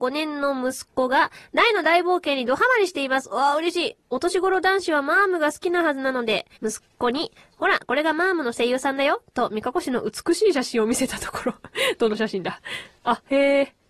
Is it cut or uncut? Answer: cut